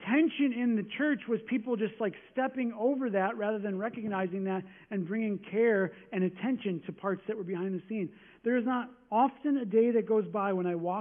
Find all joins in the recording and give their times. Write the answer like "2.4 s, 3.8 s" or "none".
none